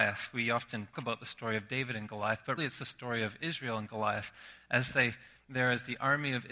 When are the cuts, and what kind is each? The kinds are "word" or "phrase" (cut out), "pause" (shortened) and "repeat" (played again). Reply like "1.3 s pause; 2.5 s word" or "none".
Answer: 0.9 s word; 2.6 s word; 5.4 s word